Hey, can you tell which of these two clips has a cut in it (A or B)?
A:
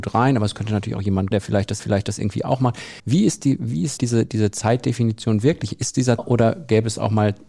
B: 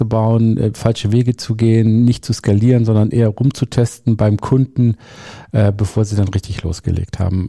A